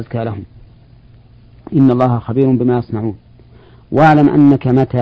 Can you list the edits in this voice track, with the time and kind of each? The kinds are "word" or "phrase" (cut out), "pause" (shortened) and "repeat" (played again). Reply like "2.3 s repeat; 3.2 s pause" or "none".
none